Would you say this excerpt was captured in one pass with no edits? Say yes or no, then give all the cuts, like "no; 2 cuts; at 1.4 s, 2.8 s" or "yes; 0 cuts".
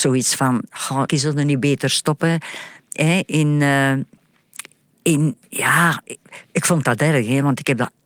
no; 1 cut; at 1.1 s